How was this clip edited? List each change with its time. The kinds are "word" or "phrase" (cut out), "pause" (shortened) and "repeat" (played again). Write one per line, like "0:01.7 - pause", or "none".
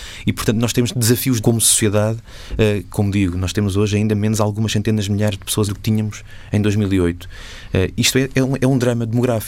0:01.4 - word
0:05.7 - word